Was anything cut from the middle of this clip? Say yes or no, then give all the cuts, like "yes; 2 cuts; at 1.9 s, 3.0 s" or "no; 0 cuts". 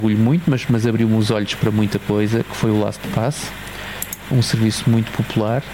yes; 1 cut; at 4.3 s